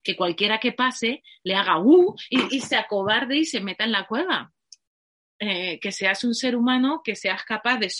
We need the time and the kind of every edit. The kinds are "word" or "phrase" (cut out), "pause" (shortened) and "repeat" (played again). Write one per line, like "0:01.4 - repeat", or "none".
0:02.5 - word